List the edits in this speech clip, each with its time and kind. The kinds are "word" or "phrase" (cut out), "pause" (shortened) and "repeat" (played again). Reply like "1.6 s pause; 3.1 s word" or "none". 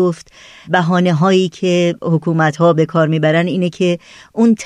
none